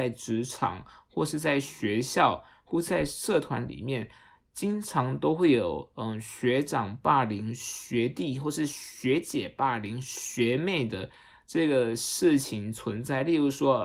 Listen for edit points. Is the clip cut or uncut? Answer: uncut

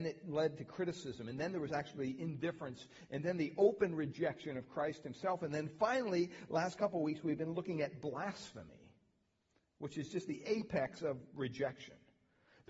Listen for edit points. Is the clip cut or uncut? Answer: uncut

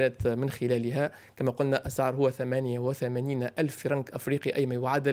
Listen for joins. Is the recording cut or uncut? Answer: uncut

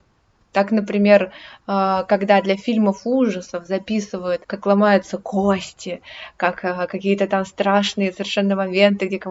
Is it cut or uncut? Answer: cut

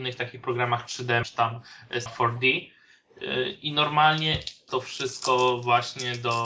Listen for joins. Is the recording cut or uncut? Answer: cut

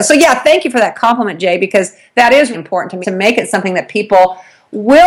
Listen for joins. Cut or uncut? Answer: cut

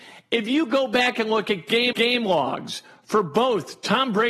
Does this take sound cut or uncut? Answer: cut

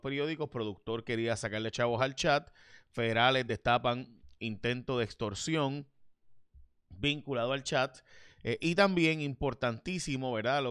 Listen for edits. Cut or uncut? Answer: uncut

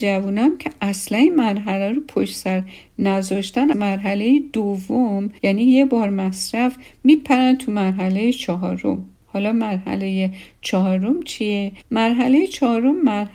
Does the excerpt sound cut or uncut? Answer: cut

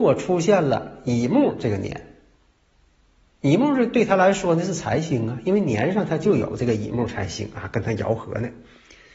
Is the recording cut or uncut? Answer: uncut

